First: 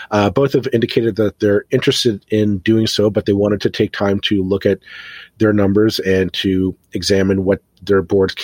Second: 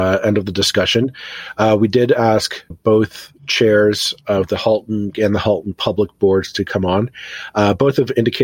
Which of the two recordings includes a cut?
second; 2 cuts; at 2.7 s, 5.1 s

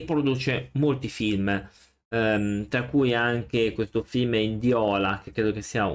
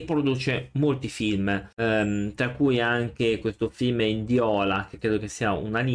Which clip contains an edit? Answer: second; 1 cut; at 1.7 s

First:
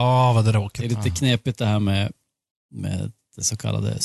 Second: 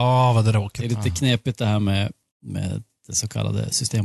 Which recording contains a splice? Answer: second; 1 cut; at 2.3 s

